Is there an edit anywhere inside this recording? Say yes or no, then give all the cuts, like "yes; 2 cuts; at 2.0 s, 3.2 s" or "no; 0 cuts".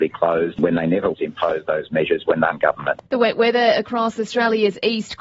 yes; 3 cuts; at 1.1 s, 2.5 s, 3.1 s